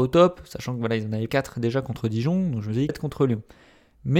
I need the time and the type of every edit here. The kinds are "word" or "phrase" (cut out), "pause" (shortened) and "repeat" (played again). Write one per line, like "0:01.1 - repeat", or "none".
0:01.3 - word
0:02.9 - phrase